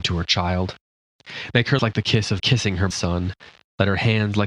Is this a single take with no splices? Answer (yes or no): no